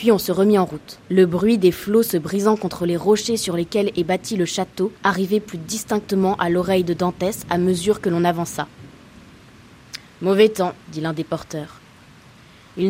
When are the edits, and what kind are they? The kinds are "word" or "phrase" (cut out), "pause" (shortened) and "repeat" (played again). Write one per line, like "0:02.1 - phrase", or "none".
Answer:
0:01.0 - pause
0:05.0 - pause
0:10.8 - pause